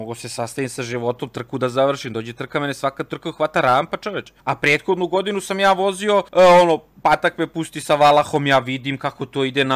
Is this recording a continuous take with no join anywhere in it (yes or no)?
no